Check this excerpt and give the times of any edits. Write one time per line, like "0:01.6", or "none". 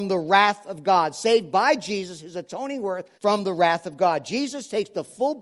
0:03.1